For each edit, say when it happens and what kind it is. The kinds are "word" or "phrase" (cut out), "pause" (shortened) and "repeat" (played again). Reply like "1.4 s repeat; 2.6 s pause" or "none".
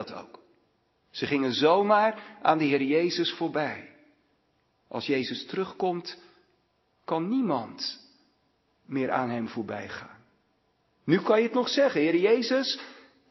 none